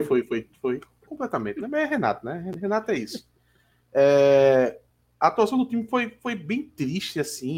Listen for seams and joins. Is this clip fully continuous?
yes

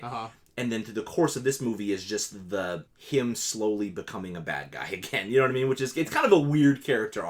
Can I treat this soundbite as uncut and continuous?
no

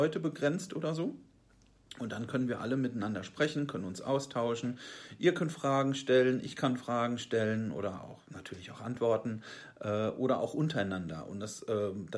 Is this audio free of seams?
yes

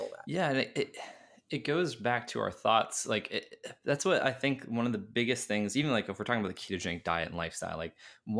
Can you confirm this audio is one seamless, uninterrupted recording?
yes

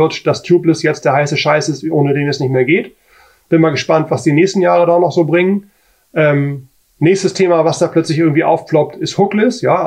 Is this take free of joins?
yes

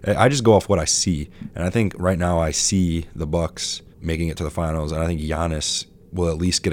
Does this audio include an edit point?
yes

